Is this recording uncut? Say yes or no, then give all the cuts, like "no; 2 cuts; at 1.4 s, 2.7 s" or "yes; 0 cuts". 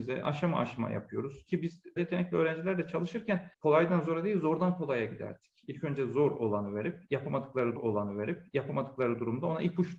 no; 3 cuts; at 2.0 s, 3.5 s, 7.8 s